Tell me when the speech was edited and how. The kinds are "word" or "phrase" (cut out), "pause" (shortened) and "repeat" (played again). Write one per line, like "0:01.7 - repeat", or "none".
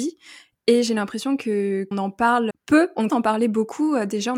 0:01.9 - word
0:02.5 - word
0:03.1 - word